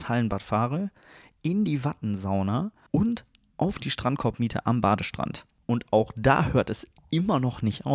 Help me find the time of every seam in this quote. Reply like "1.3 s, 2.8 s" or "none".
none